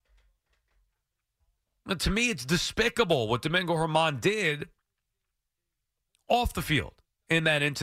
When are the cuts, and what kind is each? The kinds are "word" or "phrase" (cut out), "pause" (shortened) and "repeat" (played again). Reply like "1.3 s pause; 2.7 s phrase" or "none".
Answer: none